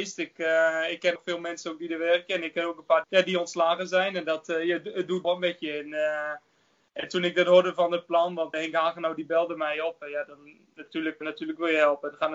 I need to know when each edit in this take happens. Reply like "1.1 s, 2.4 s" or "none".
1.2 s, 3.0 s, 5.2 s, 8.5 s, 11.2 s